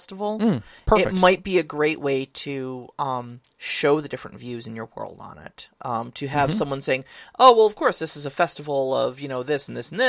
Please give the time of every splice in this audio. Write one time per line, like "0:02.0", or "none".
none